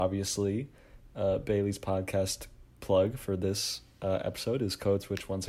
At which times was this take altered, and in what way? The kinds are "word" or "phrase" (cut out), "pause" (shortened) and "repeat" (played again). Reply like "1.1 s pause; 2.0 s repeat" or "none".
none